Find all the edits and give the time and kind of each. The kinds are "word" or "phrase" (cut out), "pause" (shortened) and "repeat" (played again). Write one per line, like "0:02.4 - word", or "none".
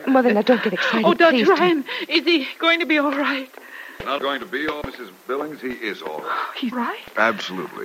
0:04.2 - word
0:04.8 - word
0:06.7 - word